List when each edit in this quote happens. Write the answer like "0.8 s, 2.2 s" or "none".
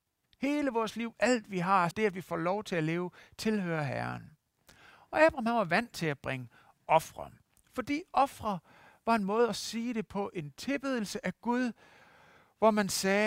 1.9 s

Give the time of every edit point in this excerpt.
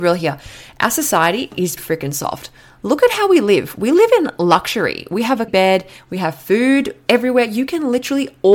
1.8 s, 5.5 s

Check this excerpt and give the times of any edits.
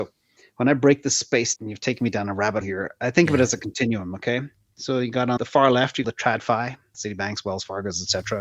1.6 s, 2.6 s, 5.4 s, 6.0 s, 6.9 s

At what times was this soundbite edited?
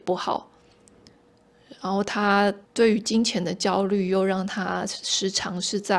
2.6 s

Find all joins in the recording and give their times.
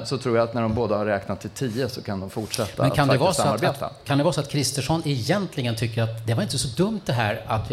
none

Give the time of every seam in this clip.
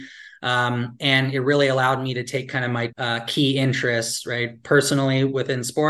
2.9 s

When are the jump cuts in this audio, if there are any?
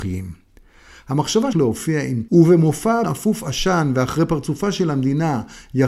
1.5 s, 2.3 s, 3.0 s

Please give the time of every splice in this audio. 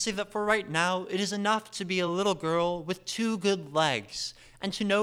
none

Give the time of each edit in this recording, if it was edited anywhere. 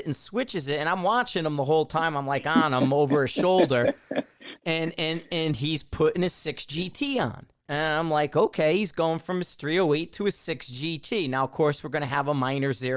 7.6 s

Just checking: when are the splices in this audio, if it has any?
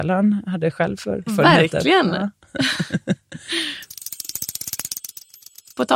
1.3 s

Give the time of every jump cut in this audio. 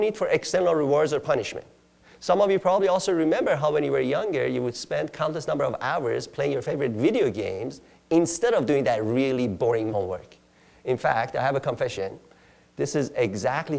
9.9 s

